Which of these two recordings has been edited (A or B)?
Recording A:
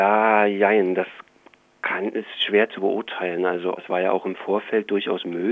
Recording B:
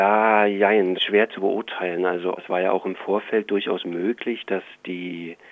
B